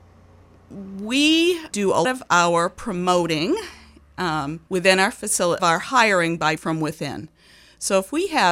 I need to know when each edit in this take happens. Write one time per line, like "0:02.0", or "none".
0:01.7
0:02.0
0:04.7
0:05.6
0:06.6